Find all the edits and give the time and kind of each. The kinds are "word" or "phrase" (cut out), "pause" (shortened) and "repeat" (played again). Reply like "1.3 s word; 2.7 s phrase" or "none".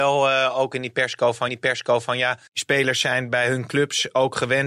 1.5 s repeat; 2.5 s pause